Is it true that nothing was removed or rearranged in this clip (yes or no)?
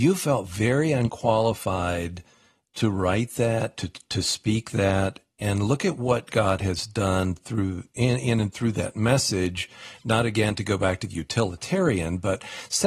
yes